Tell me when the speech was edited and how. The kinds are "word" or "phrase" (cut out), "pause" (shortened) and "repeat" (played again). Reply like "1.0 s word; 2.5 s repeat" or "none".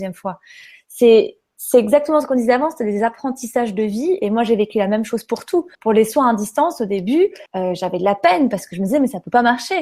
5.7 s pause; 7.5 s pause